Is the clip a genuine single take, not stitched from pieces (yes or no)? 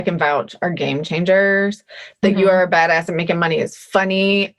yes